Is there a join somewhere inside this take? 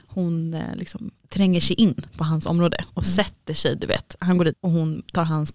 yes; 2 cuts; at 1.2 s, 4.5 s

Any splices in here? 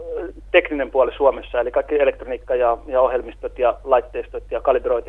no; 0 cuts

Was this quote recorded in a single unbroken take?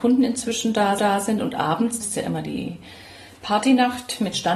no; 2 cuts; at 1.0 s, 2.0 s

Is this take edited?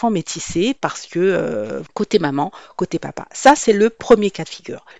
no; 0 cuts

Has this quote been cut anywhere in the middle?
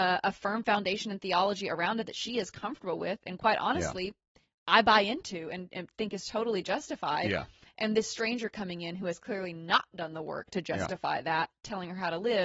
no; 0 cuts

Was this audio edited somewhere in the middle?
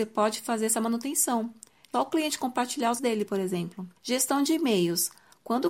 yes; 3 cuts; at 1.9 s, 3.0 s, 4.0 s

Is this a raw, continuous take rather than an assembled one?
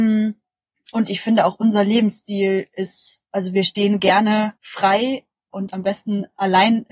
no; 2 cuts; at 3.3 s, 4.6 s

